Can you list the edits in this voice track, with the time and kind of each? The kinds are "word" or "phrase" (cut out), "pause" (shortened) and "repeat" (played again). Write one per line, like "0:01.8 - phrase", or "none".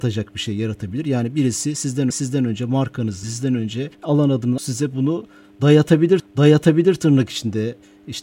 0:02.1 - repeat
0:03.2 - word
0:03.9 - pause
0:04.6 - word
0:06.2 - repeat